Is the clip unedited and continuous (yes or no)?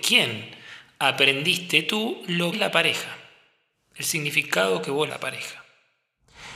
no